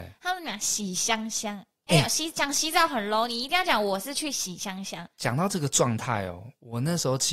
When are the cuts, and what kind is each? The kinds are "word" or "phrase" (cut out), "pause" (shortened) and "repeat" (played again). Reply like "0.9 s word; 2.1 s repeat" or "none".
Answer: 5.1 s pause